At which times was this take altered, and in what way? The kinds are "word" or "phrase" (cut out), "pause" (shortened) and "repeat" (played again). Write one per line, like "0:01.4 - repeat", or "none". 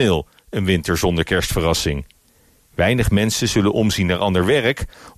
none